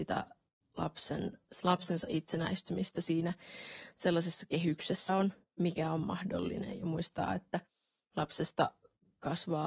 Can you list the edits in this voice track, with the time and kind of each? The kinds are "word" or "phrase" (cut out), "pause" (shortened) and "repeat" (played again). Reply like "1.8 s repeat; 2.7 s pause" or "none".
5.1 s word